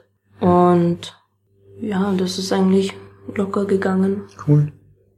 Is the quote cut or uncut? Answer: uncut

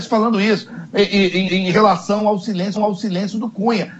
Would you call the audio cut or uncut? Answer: cut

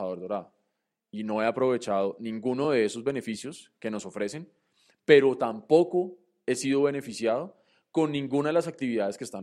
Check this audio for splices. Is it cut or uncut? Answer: uncut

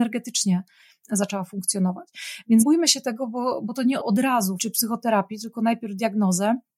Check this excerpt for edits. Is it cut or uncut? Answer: cut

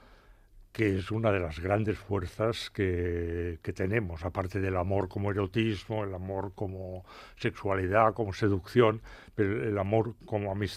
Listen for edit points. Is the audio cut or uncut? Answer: uncut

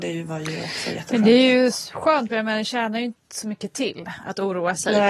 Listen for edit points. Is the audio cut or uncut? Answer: cut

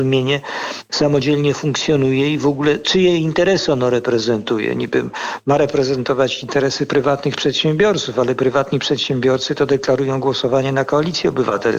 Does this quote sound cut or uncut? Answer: uncut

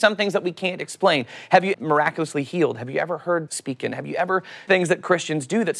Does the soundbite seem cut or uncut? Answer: cut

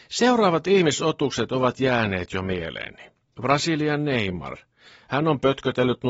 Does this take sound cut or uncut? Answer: uncut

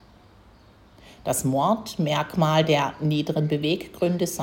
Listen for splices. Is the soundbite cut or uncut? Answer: uncut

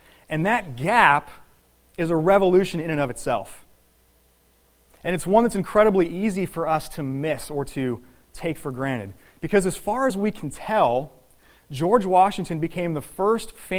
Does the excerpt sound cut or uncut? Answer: uncut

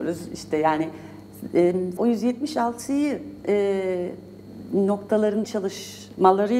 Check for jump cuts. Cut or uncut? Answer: cut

